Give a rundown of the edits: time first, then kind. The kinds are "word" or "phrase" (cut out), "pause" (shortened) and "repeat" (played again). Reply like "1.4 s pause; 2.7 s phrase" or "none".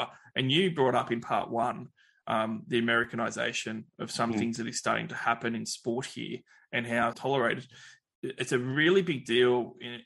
7.1 s phrase